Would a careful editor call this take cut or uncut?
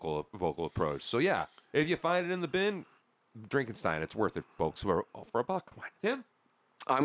cut